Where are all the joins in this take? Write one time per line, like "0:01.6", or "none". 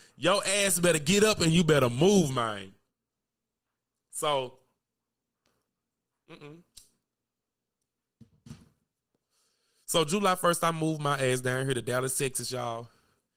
none